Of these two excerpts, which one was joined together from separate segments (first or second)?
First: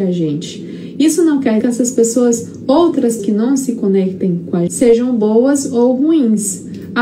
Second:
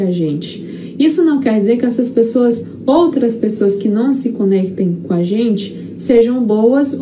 first